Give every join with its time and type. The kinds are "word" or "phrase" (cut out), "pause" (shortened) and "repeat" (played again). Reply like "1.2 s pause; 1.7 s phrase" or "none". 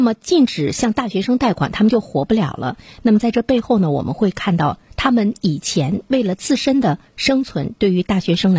7.1 s pause